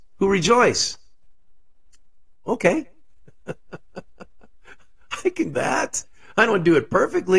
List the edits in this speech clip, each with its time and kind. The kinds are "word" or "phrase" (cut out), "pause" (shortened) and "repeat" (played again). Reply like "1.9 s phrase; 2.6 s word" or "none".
5.5 s word